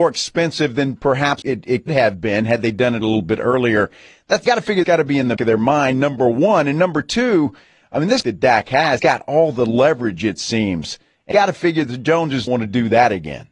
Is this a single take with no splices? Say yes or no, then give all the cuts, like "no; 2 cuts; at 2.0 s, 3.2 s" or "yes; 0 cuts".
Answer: no; 9 cuts; at 1.4 s, 1.9 s, 4.5 s, 4.8 s, 5.4 s, 8.2 s, 9.0 s, 11.3 s, 12.5 s